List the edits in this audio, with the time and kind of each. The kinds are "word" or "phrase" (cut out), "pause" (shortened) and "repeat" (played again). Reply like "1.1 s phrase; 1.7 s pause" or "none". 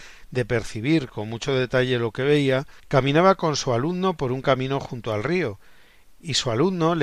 2.8 s pause